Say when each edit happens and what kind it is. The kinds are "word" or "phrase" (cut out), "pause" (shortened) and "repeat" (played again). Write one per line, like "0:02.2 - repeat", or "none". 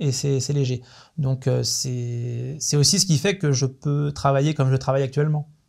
none

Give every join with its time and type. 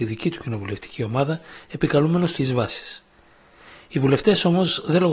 0:02.4 - phrase

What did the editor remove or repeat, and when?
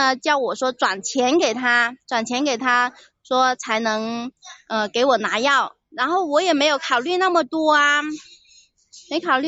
none

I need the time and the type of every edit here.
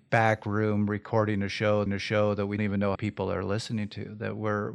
0:01.9 - repeat
0:02.6 - word
0:03.0 - phrase

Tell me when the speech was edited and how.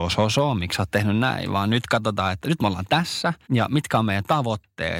0:03.4 - pause

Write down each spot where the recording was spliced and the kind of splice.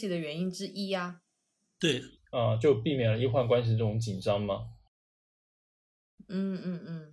0:02.2 - pause

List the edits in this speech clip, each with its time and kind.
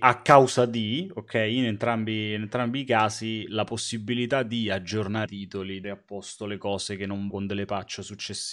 0:05.3 - word
0:05.8 - word
0:07.3 - word

